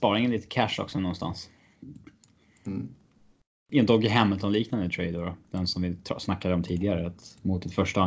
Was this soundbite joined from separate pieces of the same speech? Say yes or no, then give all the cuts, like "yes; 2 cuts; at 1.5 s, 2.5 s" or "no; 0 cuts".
no; 0 cuts